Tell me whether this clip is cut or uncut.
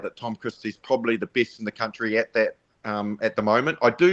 uncut